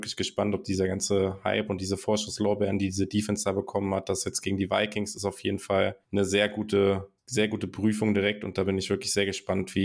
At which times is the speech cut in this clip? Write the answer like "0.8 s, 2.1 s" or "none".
6.0 s, 7.2 s